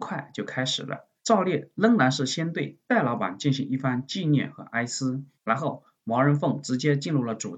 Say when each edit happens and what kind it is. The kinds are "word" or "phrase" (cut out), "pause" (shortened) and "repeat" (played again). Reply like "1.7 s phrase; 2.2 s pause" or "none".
1.2 s pause; 5.3 s pause

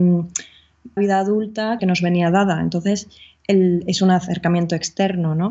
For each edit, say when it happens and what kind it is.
1.0 s phrase; 1.8 s phrase

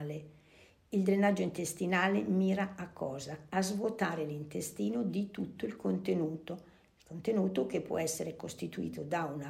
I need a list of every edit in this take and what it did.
none

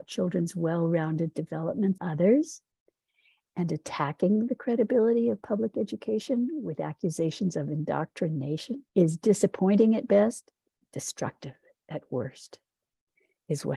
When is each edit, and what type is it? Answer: 2.0 s word; 8.9 s pause; 10.8 s word

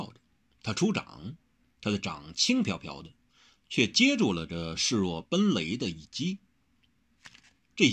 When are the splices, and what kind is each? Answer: none

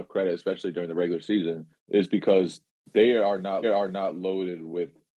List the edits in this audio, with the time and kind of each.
1.8 s pause; 3.6 s repeat

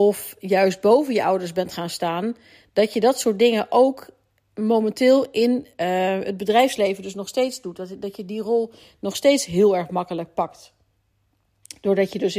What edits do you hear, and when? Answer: none

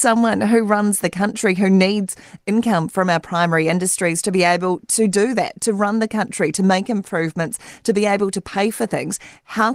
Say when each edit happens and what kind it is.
none

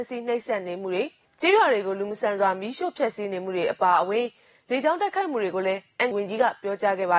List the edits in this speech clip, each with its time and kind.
1.2 s pause; 6.1 s word

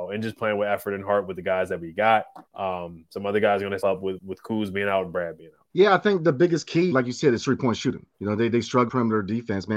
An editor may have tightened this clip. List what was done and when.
2.5 s pause; 3.8 s word; 4.2 s word; 5.7 s pause; 6.9 s word; 8.1 s pause; 8.9 s word

